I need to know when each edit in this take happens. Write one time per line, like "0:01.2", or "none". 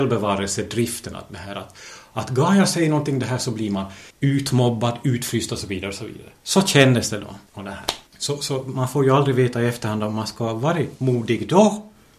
0:04.1
0:07.5
0:08.1